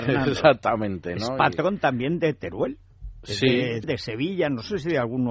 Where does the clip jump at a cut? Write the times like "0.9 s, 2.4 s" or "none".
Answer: 3.8 s